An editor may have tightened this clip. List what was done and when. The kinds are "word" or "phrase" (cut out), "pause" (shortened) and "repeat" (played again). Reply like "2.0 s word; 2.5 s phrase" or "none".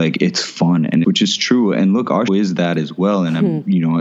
1.0 s word; 2.3 s word